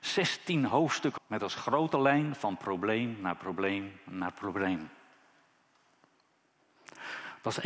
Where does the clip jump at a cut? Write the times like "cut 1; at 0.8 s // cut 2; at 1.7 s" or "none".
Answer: cut 1; at 1.2 s